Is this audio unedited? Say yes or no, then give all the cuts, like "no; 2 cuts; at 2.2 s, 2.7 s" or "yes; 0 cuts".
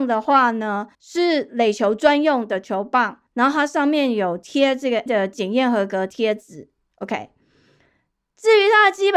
no; 3 cuts; at 0.9 s, 3.3 s, 5.1 s